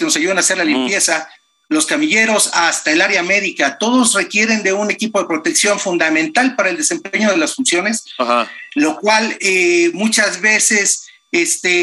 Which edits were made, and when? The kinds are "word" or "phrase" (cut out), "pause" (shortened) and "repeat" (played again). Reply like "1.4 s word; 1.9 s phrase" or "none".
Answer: none